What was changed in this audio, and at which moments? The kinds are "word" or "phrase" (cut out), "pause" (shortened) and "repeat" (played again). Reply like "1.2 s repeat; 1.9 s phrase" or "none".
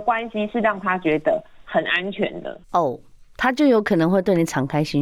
2.6 s pause